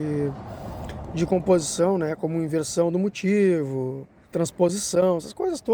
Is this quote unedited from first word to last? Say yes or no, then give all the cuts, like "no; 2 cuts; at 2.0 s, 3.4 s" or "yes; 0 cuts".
no; 1 cut; at 4.3 s